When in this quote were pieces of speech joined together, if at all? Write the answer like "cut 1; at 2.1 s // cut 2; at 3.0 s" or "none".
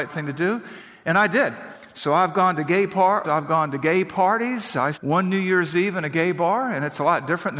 cut 1; at 3.2 s // cut 2; at 4.9 s